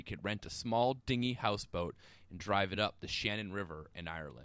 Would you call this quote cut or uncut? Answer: uncut